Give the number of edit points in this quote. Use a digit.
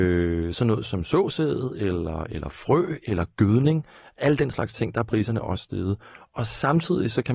0